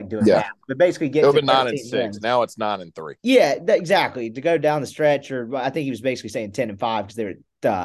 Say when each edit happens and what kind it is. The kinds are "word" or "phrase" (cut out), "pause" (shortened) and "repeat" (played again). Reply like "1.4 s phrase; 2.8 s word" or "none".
3.2 s pause